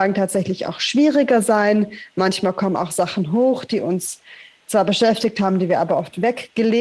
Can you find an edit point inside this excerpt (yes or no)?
no